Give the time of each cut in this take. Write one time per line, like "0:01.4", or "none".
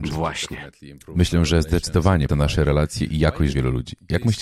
0:02.3
0:03.5